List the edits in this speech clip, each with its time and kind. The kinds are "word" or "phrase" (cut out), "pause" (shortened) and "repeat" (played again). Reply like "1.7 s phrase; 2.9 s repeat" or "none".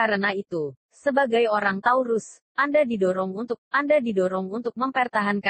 3.6 s repeat